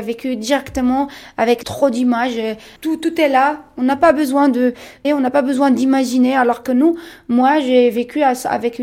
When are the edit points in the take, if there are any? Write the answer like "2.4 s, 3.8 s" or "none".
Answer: 2.8 s, 5.0 s